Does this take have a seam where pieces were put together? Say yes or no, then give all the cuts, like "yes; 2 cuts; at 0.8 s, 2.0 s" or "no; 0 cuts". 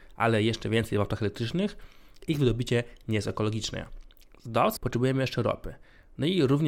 yes; 1 cut; at 4.8 s